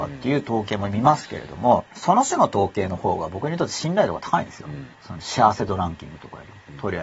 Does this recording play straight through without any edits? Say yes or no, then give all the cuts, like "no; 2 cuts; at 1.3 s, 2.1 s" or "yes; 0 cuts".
no; 2 cuts; at 1.9 s, 4.9 s